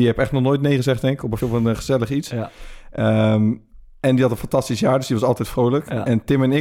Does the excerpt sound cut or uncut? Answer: cut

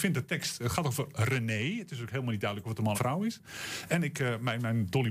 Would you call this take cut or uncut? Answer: cut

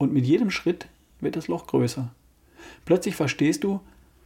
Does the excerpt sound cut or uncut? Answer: uncut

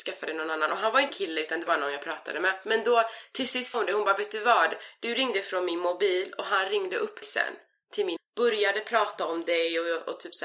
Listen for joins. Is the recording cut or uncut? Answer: cut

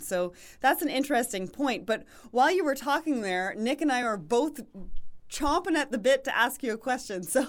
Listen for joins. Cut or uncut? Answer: uncut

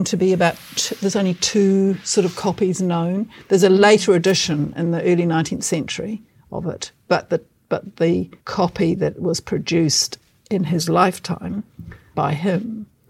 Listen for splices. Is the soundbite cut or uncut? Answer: cut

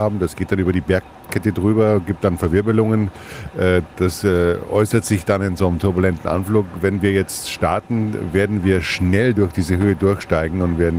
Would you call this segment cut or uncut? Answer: uncut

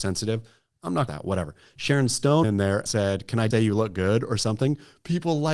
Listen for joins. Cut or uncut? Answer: cut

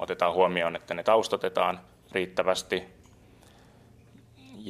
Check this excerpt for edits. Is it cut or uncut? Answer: cut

